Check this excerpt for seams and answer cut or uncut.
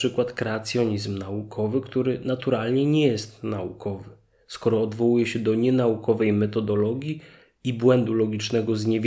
uncut